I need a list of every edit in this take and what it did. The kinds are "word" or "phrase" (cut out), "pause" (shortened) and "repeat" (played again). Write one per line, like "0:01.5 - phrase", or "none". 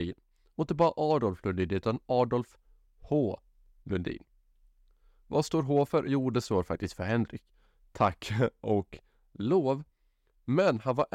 none